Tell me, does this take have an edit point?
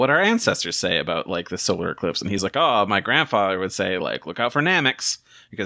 no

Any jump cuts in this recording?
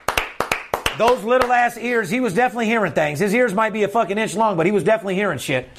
no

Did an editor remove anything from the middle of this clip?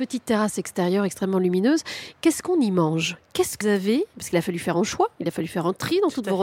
yes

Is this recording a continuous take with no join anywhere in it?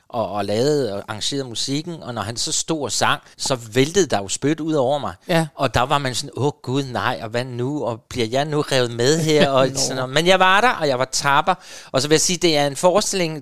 no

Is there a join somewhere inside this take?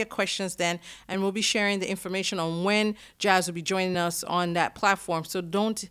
no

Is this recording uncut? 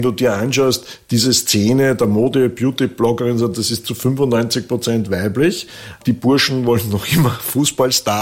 yes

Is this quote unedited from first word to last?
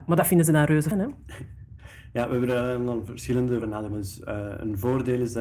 no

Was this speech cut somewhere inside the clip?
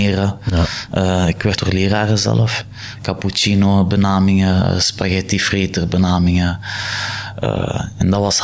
yes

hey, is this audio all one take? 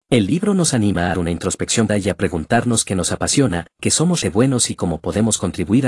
no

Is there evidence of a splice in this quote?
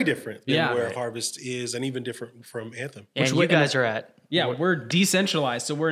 no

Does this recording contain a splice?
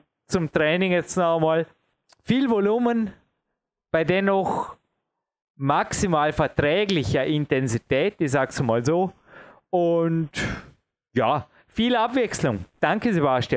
no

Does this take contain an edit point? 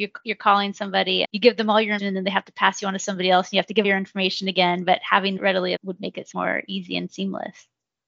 yes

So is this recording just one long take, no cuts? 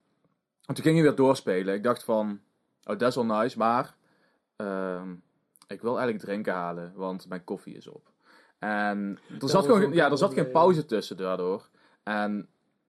yes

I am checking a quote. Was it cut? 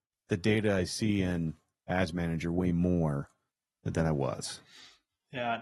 no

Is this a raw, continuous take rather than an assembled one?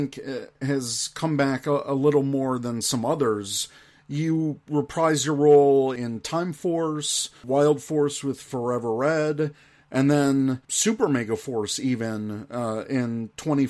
yes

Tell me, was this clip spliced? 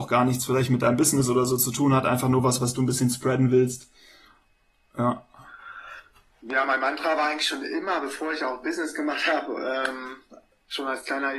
no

